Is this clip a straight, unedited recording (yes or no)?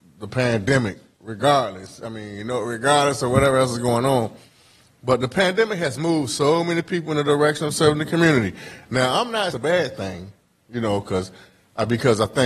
no